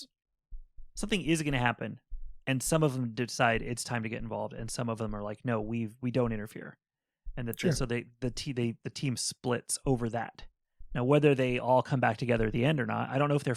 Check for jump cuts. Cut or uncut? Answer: uncut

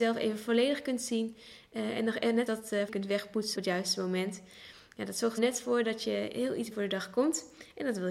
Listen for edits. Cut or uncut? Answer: cut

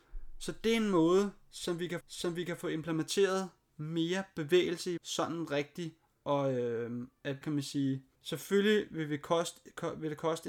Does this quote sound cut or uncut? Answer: cut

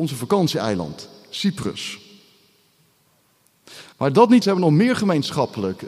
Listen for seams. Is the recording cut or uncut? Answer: cut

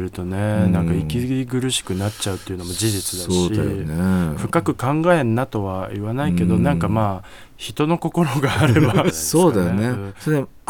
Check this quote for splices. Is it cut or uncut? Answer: cut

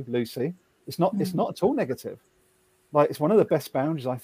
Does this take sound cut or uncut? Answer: uncut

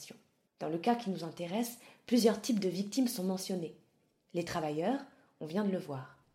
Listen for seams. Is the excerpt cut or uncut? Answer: uncut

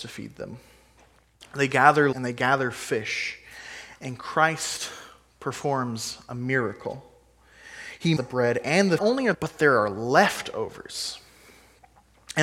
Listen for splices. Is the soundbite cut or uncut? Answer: cut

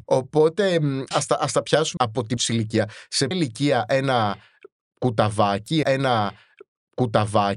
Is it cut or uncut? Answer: cut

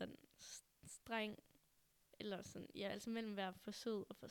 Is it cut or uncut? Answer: uncut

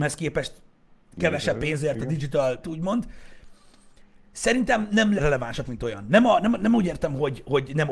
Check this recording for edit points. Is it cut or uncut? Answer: cut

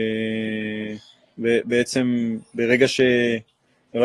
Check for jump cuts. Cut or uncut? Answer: uncut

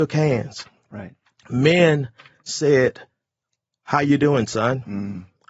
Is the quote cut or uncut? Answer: uncut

